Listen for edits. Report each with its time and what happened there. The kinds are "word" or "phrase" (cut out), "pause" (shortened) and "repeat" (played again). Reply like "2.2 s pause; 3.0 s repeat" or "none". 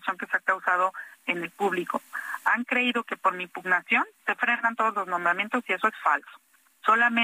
4.1 s pause